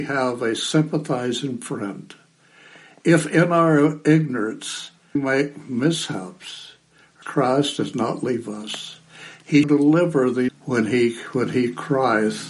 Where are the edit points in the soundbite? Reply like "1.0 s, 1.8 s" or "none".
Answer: 5.2 s, 7.2 s, 9.6 s, 10.5 s

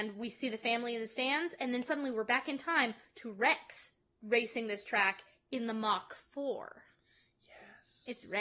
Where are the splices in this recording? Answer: none

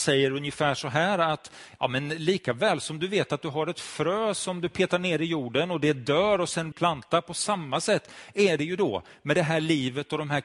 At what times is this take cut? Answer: 6.7 s

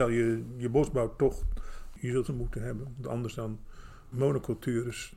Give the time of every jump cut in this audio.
2.3 s, 4.1 s

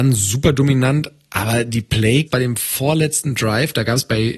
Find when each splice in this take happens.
2.3 s

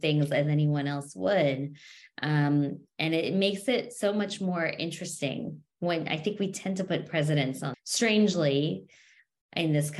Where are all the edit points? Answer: 7.7 s

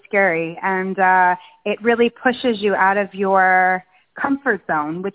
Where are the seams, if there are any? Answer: none

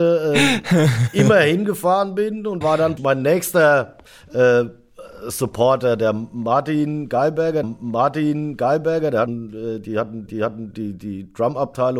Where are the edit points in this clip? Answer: 2.6 s, 3.0 s, 4.1 s, 7.6 s, 9.3 s, 10.3 s

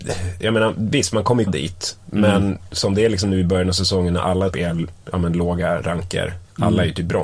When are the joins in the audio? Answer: 1.5 s, 4.5 s

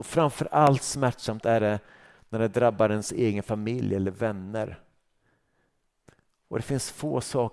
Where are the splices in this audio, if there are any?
none

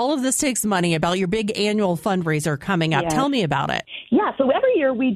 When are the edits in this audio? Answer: none

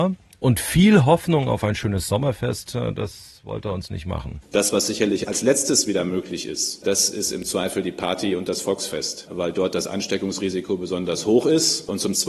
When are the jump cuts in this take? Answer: none

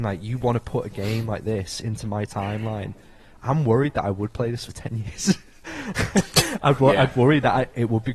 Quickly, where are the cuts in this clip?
none

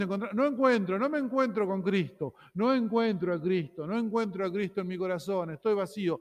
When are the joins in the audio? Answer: none

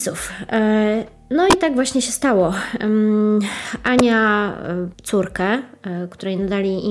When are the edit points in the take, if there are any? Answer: 4.9 s

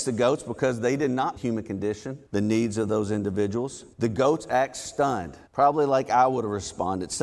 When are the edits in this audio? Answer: 1.4 s, 2.3 s, 3.9 s, 5.5 s

